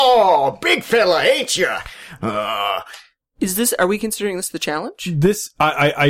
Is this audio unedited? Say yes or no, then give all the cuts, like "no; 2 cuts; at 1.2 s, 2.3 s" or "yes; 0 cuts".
yes; 0 cuts